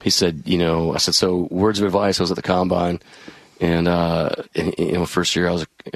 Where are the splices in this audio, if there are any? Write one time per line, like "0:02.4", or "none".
none